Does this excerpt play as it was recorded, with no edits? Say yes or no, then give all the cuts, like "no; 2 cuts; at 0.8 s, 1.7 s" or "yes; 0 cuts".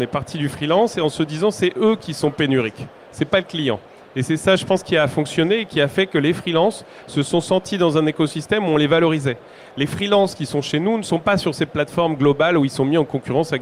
yes; 0 cuts